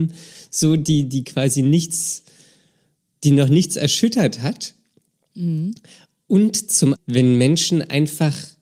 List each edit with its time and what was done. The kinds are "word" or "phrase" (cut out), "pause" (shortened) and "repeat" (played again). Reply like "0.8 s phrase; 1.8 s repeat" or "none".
7.0 s word

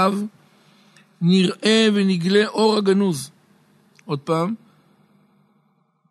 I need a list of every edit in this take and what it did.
none

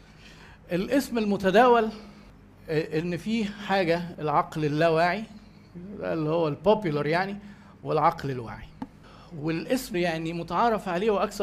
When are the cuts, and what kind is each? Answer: 4.1 s word; 9.9 s word

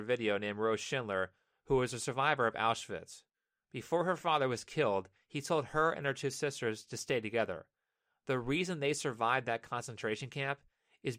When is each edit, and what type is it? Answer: none

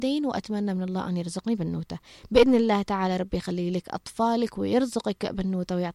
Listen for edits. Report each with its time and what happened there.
none

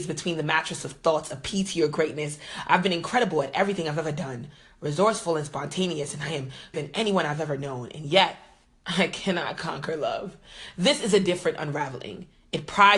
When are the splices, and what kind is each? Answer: 6.7 s word

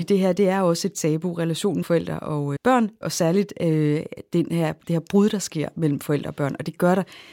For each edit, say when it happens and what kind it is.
1.8 s word; 2.6 s word; 3.0 s word

